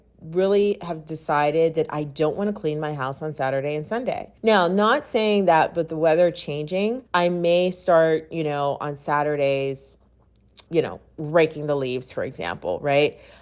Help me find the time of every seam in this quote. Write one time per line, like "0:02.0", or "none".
0:04.4
0:07.1
0:10.7